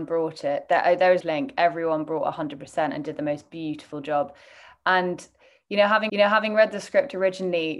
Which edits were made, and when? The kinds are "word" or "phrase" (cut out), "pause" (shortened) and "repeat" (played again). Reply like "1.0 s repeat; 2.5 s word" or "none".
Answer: 1.2 s phrase; 6.1 s repeat